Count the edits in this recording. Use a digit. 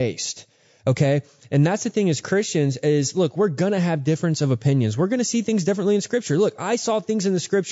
0